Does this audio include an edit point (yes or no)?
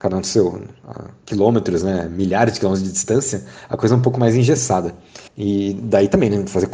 yes